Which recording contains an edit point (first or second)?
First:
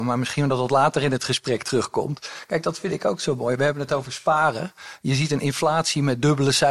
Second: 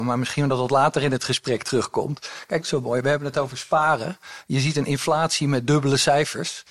second